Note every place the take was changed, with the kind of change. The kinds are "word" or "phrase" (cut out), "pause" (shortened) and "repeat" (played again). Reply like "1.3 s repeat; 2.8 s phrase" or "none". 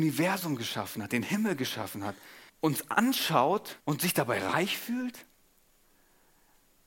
2.5 s pause; 3.8 s pause